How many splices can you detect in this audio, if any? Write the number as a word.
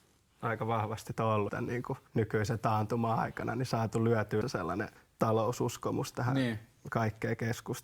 five